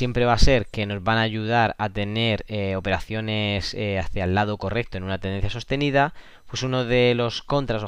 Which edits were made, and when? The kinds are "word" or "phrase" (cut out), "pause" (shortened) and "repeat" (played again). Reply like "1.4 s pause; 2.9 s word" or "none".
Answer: none